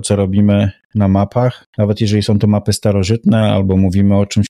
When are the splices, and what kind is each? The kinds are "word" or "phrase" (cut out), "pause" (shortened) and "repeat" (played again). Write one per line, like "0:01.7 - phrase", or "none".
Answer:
0:01.7 - pause